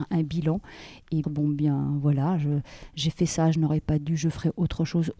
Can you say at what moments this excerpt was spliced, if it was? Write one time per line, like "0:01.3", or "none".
0:01.2